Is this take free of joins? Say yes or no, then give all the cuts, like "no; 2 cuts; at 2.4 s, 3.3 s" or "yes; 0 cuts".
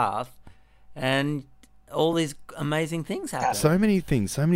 yes; 0 cuts